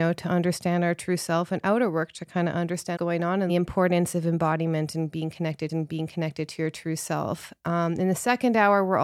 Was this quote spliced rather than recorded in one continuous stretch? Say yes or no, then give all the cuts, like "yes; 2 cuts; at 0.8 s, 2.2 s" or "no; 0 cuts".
yes; 3 cuts; at 3.0 s, 3.5 s, 5.7 s